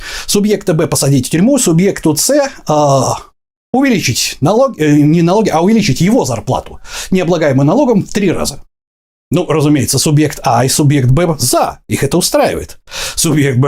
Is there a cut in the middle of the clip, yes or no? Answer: no